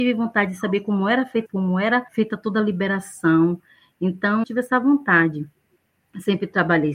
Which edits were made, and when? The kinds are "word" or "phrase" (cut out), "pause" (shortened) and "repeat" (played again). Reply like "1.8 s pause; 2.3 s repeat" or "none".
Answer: 1.5 s phrase; 2.1 s pause; 4.4 s phrase